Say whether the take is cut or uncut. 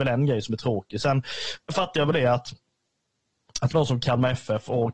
cut